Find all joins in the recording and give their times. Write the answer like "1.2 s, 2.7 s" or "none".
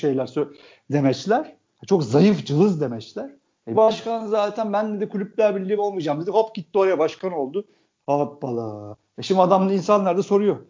3.7 s, 5.8 s